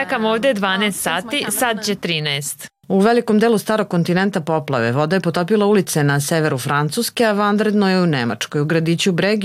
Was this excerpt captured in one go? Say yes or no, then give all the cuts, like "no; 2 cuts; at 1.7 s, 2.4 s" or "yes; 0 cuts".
no; 1 cut; at 2.8 s